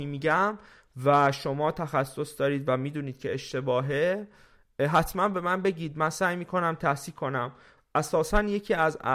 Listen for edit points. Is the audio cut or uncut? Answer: uncut